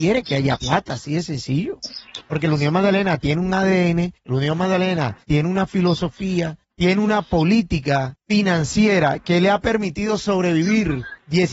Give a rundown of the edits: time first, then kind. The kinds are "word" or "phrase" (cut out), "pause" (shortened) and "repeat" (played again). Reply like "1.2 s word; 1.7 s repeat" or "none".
5.2 s pause; 6.6 s pause